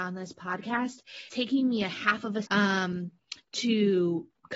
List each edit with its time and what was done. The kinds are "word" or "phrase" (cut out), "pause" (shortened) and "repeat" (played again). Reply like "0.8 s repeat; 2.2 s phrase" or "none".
1.3 s word; 2.5 s word